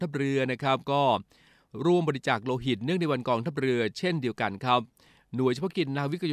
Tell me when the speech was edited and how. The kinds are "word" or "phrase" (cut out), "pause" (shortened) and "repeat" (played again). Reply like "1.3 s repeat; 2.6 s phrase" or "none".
none